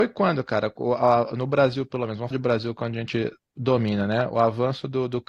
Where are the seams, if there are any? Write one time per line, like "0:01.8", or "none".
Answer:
0:02.3